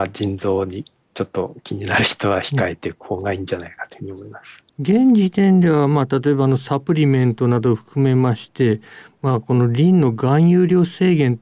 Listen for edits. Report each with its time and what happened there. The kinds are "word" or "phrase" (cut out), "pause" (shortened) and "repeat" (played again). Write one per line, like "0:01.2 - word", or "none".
0:04.7 - pause